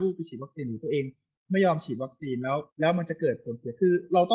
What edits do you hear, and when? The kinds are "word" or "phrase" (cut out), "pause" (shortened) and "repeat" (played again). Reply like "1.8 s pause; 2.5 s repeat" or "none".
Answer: 2.7 s pause